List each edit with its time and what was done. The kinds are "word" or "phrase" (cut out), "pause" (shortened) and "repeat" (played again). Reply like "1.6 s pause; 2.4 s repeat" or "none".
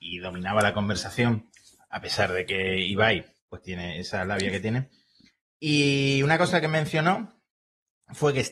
none